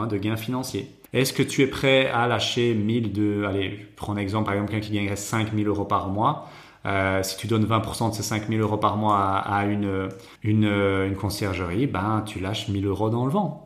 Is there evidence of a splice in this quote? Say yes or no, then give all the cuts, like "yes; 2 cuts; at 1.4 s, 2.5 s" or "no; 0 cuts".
yes; 2 cuts; at 1.1 s, 10.4 s